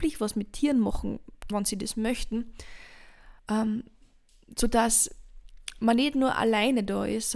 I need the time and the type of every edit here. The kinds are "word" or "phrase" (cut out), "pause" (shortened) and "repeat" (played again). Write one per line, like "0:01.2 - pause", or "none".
0:01.5 - word
0:03.4 - pause